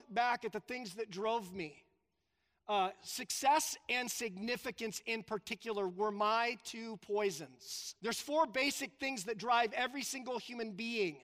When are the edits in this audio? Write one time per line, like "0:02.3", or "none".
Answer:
0:08.0